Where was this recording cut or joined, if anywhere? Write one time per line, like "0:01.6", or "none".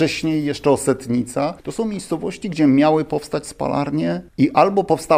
0:01.6
0:04.3